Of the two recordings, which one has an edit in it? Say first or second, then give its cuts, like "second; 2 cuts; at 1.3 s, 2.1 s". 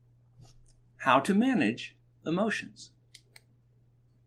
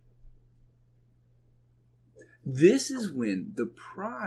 first; 1 cut; at 2.2 s